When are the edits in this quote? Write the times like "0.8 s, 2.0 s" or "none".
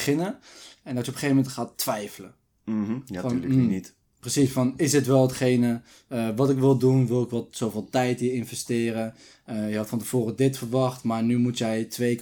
none